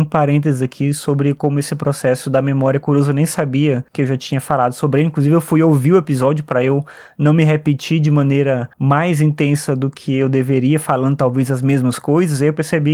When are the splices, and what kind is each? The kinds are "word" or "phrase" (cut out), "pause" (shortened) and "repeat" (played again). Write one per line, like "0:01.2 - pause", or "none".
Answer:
0:03.9 - pause
0:08.7 - pause